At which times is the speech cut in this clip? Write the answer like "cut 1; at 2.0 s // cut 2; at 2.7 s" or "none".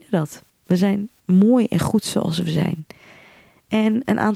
none